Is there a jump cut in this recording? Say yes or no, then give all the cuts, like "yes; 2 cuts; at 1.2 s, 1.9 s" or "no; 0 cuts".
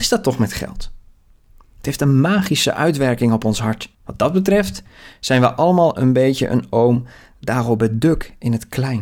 yes; 1 cut; at 3.9 s